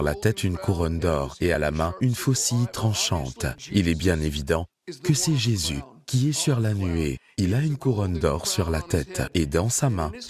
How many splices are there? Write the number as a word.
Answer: zero